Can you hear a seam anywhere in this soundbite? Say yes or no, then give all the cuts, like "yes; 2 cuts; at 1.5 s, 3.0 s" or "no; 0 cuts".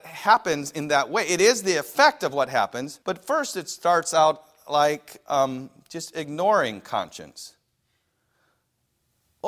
yes; 1 cut; at 3.0 s